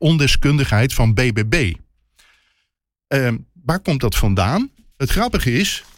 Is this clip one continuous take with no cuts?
yes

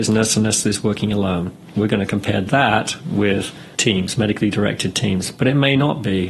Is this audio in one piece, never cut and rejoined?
yes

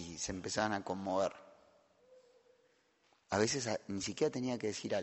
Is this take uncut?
yes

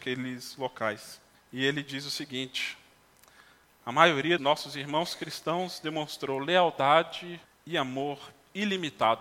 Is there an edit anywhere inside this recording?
yes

